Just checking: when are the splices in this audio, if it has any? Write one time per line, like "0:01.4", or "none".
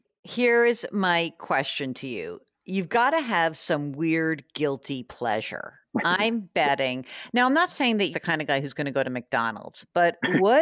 0:08.1

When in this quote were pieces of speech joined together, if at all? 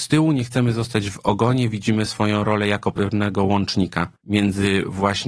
0:04.2

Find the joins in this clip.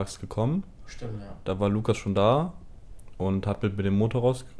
none

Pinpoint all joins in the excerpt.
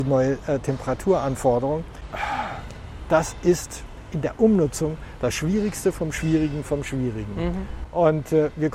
none

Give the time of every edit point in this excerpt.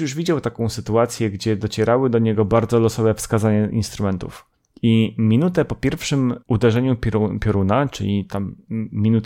0:04.5
0:06.4

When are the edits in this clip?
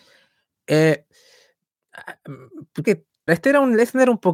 0:02.8
0:03.3

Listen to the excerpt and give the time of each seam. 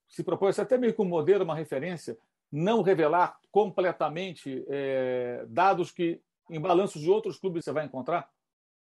0:07.6

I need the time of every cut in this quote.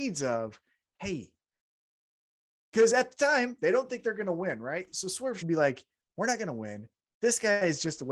0:05.4

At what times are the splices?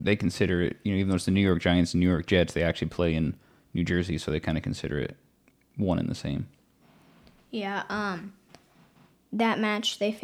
none

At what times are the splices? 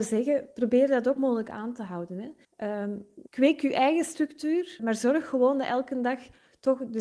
0:01.2
0:02.4
0:03.3
0:04.8

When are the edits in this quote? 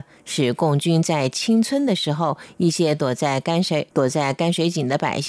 0:03.9

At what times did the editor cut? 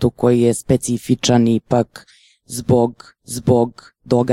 0:03.2

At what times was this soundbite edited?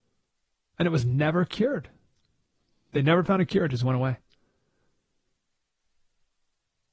none

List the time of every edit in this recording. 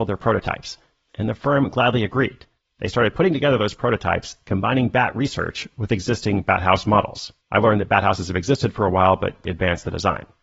0:02.6
0:07.4
0:09.4

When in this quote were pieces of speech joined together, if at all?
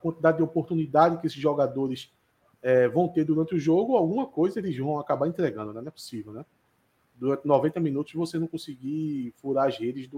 none

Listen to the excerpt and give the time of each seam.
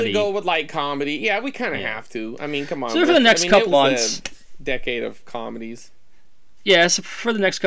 0:03.7

